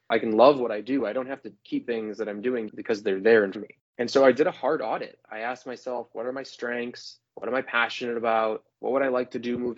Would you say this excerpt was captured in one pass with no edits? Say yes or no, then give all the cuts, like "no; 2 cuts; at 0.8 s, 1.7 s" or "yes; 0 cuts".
no; 5 cuts; at 1.8 s, 2.7 s, 3.5 s, 7.3 s, 8.7 s